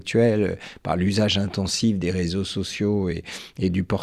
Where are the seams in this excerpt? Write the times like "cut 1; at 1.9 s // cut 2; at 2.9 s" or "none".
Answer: none